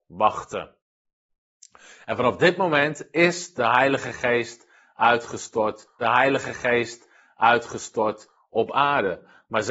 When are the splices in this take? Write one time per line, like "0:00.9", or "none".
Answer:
0:06.0